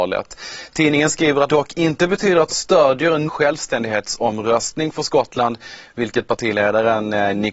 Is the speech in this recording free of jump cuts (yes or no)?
no